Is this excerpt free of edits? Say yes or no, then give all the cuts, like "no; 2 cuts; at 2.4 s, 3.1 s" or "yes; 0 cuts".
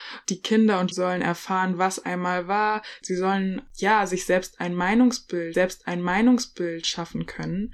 no; 2 cuts; at 0.9 s, 5.5 s